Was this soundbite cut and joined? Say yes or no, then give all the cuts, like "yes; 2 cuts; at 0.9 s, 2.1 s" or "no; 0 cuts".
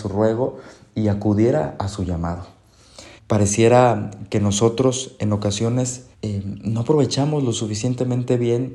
yes; 2 cuts; at 3.2 s, 6.1 s